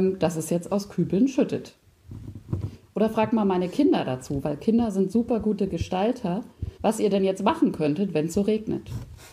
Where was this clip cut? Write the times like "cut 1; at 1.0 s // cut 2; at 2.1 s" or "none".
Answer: cut 1; at 6.7 s